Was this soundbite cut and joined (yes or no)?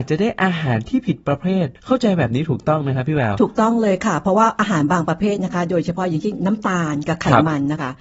yes